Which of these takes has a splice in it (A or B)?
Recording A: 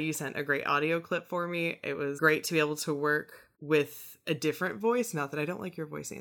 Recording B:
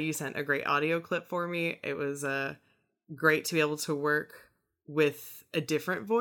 A